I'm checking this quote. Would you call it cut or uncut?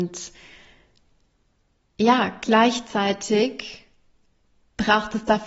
uncut